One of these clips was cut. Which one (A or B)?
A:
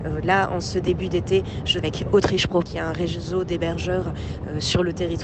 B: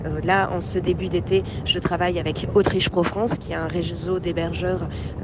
A